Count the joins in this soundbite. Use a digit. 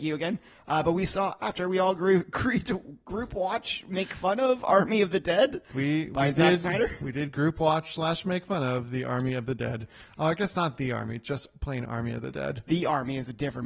0